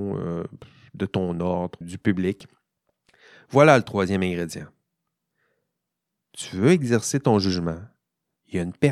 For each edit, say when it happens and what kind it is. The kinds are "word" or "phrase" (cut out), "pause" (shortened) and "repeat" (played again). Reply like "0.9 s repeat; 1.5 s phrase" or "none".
1.8 s word